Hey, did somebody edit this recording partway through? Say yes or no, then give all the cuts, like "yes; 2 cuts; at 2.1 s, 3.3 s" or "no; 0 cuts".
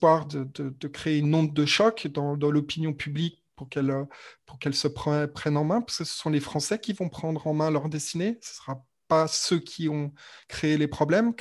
no; 0 cuts